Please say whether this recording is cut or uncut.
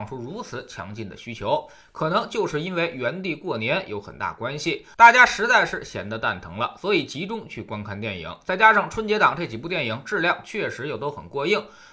uncut